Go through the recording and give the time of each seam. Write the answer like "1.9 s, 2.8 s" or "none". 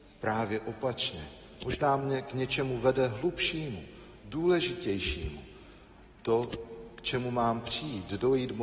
none